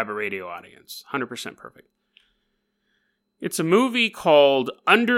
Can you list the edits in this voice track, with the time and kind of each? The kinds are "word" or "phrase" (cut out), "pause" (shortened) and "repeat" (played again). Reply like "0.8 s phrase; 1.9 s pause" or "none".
none